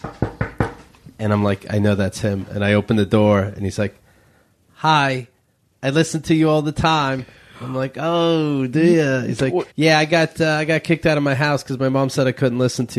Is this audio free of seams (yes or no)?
no